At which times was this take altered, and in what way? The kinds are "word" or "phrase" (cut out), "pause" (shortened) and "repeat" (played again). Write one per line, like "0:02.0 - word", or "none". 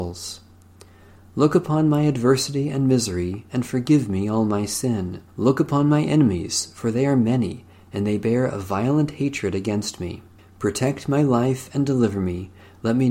0:05.3 - pause
0:10.4 - pause